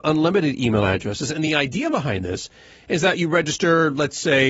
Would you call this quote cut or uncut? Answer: uncut